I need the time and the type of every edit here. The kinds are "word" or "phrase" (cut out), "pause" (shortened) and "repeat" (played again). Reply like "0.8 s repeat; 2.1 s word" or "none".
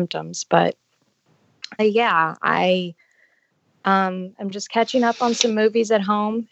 1.8 s word